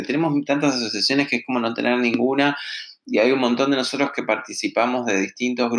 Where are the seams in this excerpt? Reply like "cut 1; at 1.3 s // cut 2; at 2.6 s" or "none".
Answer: none